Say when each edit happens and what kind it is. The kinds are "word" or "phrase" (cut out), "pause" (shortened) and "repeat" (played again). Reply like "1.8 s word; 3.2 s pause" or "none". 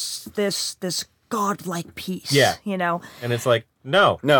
none